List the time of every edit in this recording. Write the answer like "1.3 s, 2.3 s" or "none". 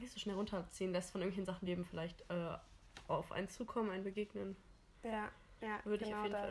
1.6 s